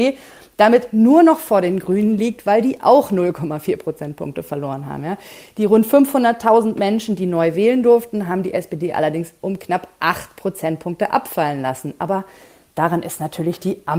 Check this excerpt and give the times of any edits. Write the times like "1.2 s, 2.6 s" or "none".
none